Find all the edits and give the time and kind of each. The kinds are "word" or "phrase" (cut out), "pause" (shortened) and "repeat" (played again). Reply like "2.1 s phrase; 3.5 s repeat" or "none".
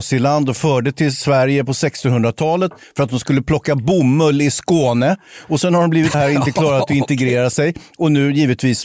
6.1 s word